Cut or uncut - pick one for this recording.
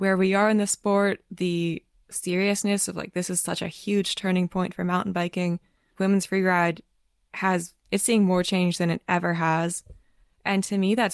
cut